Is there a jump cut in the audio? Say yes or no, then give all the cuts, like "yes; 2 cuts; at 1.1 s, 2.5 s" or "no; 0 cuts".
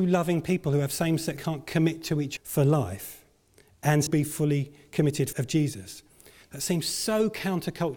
yes; 4 cuts; at 1.4 s, 2.4 s, 4.1 s, 5.3 s